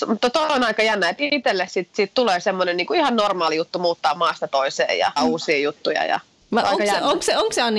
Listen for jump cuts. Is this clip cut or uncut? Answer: cut